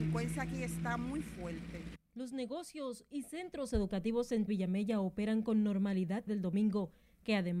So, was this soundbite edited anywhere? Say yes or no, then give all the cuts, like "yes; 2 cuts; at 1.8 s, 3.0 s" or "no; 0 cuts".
yes; 2 cuts; at 4.5 s, 6.3 s